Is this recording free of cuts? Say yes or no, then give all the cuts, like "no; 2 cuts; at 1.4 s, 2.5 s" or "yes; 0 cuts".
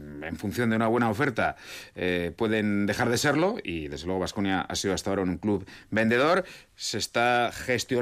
yes; 0 cuts